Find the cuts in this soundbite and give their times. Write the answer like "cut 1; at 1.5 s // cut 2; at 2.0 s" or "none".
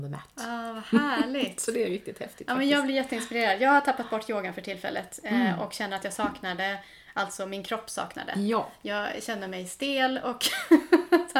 none